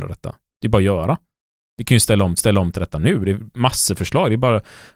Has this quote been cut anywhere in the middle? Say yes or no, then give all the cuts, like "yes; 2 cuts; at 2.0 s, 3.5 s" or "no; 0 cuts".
yes; 1 cut; at 2.4 s